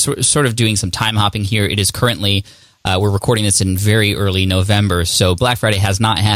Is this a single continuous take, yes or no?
yes